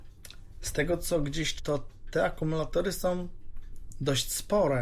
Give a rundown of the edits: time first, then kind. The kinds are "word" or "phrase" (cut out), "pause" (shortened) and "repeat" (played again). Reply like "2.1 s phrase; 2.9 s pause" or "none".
1.6 s word

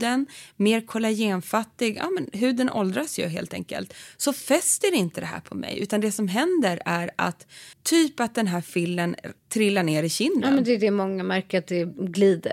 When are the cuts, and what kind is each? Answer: 7.7 s pause; 9.4 s pause

